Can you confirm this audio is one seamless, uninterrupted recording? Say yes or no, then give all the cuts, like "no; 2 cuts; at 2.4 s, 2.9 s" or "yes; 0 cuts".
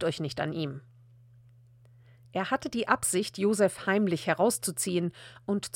yes; 0 cuts